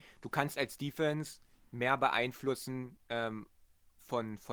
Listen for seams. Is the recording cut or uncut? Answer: uncut